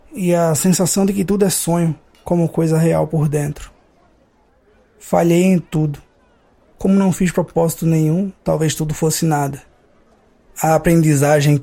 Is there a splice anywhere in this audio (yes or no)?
no